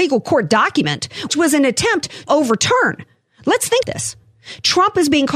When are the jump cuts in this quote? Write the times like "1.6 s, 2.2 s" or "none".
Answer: 1.3 s, 2.3 s, 3.8 s